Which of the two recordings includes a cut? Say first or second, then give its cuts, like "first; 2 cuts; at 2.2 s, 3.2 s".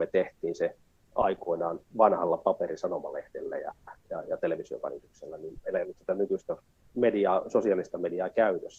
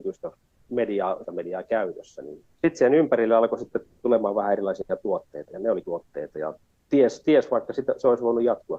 second; 4 cuts; at 1.2 s, 2.5 s, 5.5 s, 5.8 s